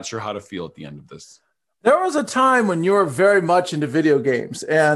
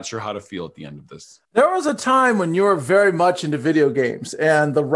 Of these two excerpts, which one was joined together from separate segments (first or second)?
second